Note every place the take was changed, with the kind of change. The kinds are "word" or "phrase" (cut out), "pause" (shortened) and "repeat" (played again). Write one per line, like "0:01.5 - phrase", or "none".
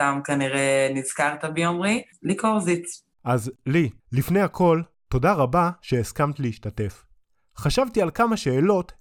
0:02.1 - pause
0:03.1 - pause
0:04.0 - pause